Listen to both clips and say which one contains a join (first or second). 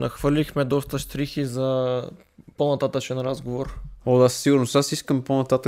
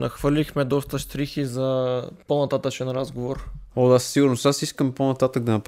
second